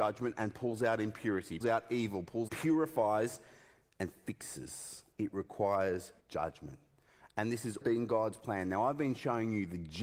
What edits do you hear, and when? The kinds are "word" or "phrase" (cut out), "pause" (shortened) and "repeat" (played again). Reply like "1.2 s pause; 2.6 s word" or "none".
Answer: 1.6 s word; 2.5 s phrase; 5.1 s pause; 6.2 s pause; 7.8 s word